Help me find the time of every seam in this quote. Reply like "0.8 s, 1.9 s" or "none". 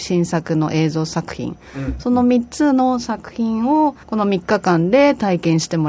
4.0 s